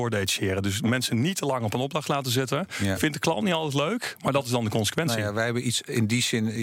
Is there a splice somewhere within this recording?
no; 0 cuts

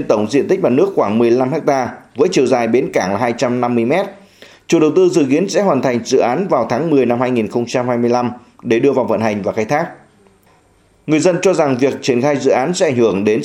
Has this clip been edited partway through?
no; 0 cuts

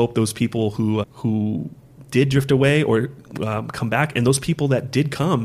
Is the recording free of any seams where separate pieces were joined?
no; 1 cut; at 1.0 s

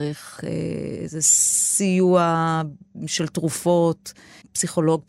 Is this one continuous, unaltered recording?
yes; 0 cuts

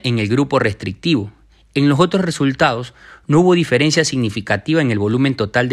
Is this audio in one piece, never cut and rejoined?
yes; 0 cuts

